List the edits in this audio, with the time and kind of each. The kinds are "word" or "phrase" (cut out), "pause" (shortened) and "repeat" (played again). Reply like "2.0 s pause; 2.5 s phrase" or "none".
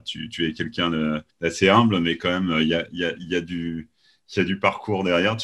1.3 s pause